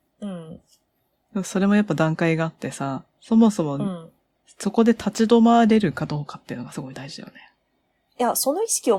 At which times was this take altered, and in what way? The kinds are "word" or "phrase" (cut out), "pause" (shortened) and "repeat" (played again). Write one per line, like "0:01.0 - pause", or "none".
none

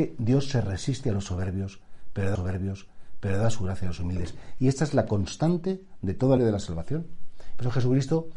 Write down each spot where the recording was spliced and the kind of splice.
0:02.4 - repeat
0:06.4 - word

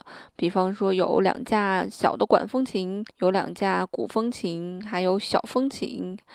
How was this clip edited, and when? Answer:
0:03.1 - pause

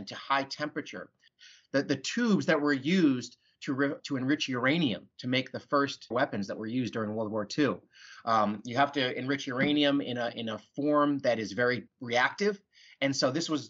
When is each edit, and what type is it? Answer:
0:04.0 - word
0:06.1 - word
0:11.9 - word

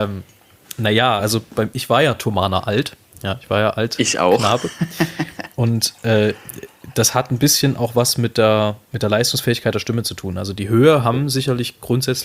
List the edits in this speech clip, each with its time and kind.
none

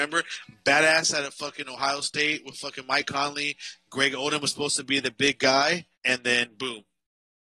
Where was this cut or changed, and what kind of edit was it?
0:05.9 - pause

